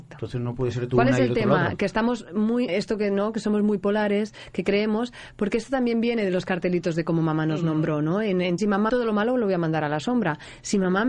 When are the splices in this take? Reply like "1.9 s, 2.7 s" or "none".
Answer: 2.7 s, 8.6 s, 8.9 s